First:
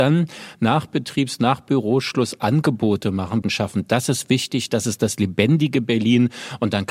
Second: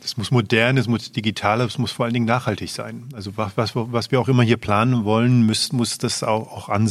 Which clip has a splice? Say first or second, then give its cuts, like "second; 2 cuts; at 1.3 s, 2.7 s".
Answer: first; 1 cut; at 3.4 s